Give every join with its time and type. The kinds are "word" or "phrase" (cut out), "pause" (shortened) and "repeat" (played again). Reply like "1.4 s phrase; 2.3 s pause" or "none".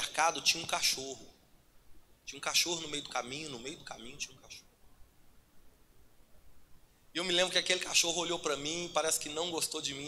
none